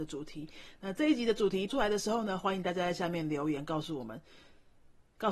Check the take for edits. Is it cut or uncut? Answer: cut